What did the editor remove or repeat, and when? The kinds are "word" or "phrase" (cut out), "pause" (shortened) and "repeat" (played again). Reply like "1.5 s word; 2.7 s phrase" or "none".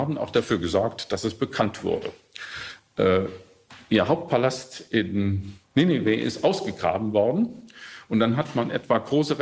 5.6 s pause